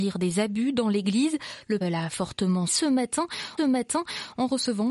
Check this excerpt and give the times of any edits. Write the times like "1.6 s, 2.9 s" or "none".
1.8 s, 2.7 s, 3.6 s